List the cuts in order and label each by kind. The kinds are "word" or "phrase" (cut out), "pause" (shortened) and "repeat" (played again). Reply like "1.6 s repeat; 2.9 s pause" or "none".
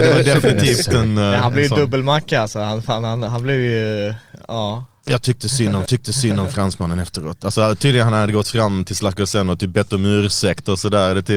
5.9 s repeat